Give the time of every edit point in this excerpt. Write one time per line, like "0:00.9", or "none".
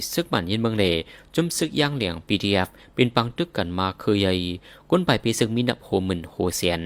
none